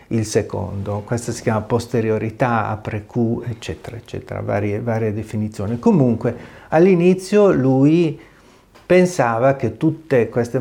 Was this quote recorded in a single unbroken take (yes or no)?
yes